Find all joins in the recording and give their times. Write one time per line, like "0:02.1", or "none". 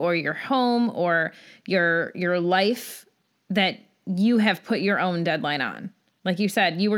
none